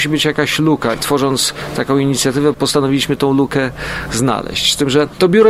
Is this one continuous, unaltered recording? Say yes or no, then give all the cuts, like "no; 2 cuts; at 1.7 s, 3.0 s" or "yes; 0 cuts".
no; 1 cut; at 0.9 s